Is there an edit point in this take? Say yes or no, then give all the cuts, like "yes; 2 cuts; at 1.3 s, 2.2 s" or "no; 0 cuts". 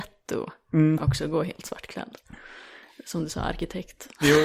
no; 0 cuts